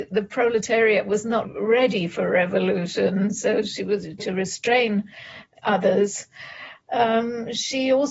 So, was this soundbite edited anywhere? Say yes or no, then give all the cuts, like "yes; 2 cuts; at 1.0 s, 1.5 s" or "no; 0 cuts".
yes; 2 cuts; at 1.4 s, 4.2 s